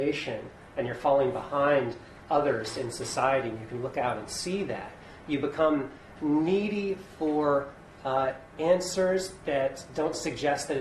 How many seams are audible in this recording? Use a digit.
1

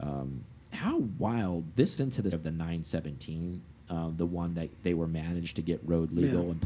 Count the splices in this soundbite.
2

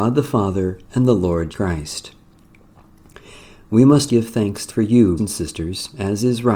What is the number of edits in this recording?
4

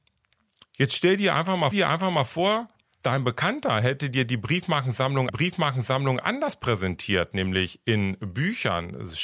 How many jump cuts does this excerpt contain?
2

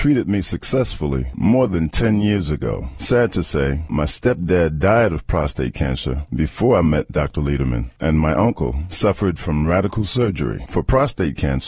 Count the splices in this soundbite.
0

